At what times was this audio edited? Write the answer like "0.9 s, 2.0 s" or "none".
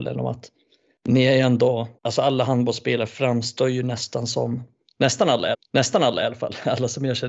2.0 s, 5.5 s